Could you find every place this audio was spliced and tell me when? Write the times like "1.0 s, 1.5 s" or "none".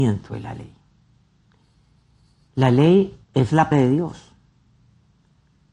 3.2 s, 3.7 s